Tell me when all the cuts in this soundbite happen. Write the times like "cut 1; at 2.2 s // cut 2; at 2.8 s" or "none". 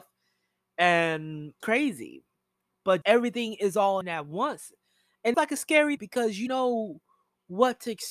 cut 1; at 1.6 s // cut 2; at 3.0 s // cut 3; at 4.0 s // cut 4; at 5.3 s // cut 5; at 6.0 s // cut 6; at 6.5 s